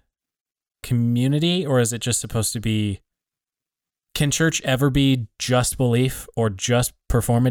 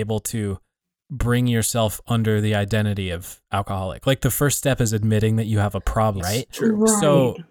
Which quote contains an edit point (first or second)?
second